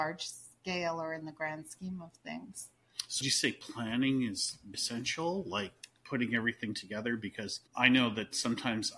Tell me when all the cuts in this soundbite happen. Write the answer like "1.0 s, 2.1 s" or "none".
3.2 s, 4.7 s, 6.0 s, 7.7 s